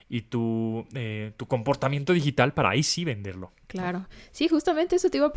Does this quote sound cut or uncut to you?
uncut